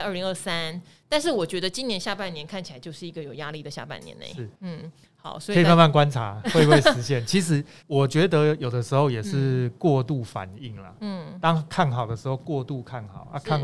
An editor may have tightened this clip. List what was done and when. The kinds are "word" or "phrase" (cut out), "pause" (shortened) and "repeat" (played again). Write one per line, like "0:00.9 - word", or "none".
0:04.6 - pause
0:07.8 - pause